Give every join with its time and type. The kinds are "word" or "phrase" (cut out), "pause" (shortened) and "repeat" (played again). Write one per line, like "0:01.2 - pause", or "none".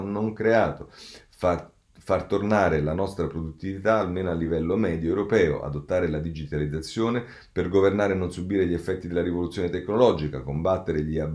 none